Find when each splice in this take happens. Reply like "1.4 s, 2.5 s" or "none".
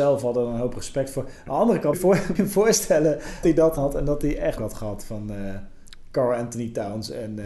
1.9 s, 2.3 s, 3.4 s, 3.8 s, 4.6 s